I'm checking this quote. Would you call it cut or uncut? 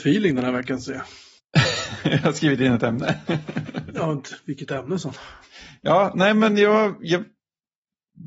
uncut